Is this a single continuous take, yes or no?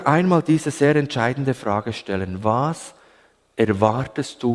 yes